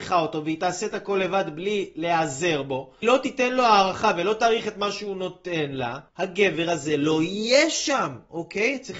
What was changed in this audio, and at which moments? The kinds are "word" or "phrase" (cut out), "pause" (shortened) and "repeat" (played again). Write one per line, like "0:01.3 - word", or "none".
0:03.0 - word
0:06.1 - pause